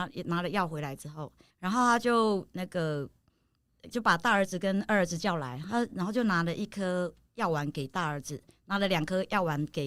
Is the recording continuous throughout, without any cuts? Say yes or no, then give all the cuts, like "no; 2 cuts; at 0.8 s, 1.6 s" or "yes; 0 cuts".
no; 1 cut; at 1.5 s